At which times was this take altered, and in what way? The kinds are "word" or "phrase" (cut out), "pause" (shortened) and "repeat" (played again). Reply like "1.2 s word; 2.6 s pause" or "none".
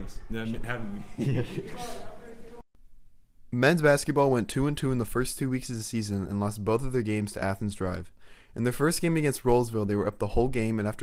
none

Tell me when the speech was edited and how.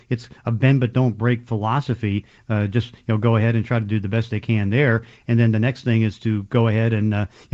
none

